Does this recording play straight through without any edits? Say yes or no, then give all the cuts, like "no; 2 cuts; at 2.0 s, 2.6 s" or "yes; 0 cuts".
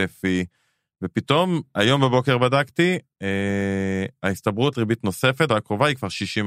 no; 2 cuts; at 4.7 s, 5.5 s